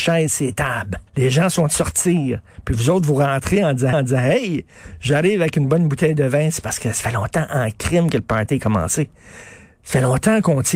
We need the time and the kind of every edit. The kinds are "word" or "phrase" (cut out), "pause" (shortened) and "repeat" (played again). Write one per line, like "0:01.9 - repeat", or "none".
0:01.1 - pause
0:01.7 - phrase
0:03.9 - repeat